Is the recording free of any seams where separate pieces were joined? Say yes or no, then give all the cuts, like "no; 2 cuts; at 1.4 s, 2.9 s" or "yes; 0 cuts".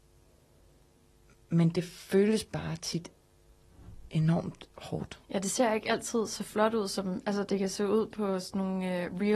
no; 1 cut; at 5.2 s